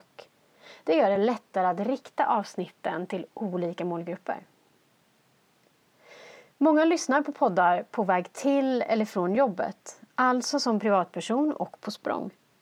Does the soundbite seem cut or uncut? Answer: uncut